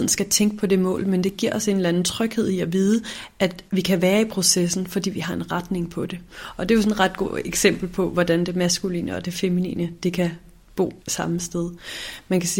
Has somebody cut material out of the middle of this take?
yes; 2 cuts; at 3.7 s, 11.0 s

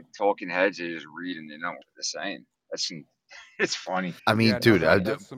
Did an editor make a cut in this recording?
yes; 2 cuts; at 1.8 s, 4.2 s

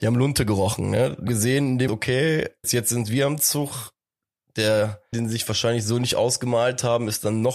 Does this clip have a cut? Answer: yes; 4 cuts; at 1.3 s, 1.9 s, 2.6 s, 5.1 s

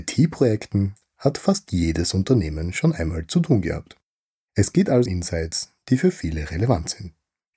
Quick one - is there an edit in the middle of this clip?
yes; 1 cut; at 5.1 s

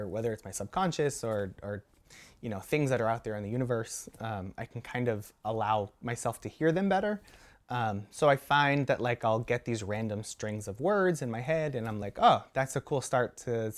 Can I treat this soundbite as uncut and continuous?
yes; 0 cuts

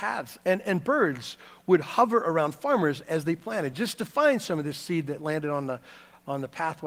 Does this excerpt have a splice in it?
no; 0 cuts

